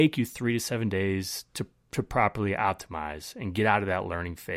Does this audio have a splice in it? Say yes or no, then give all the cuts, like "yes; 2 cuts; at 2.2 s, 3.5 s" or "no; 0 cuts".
no; 0 cuts